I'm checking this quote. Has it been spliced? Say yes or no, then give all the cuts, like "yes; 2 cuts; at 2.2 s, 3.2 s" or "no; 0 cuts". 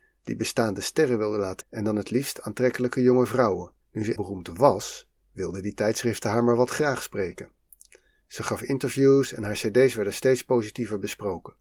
yes; 3 cuts; at 1.6 s, 3.8 s, 4.2 s